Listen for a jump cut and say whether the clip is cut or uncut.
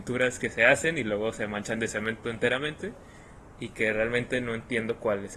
uncut